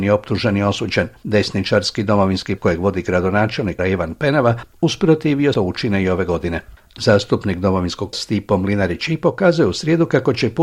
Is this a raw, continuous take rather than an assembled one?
no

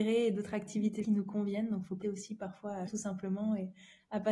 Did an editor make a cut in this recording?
yes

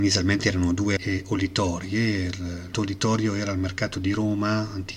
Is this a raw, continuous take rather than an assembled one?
no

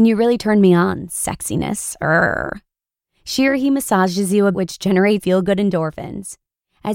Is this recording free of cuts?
no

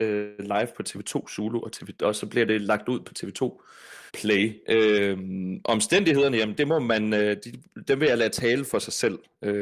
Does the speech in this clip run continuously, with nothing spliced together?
no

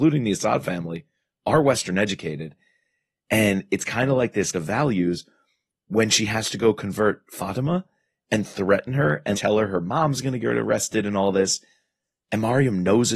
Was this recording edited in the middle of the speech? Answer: yes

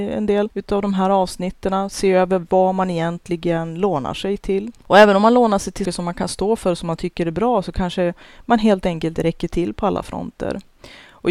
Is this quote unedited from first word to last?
no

